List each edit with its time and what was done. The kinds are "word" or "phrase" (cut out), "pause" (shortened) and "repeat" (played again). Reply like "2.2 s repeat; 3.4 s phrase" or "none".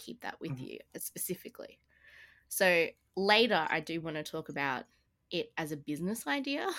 none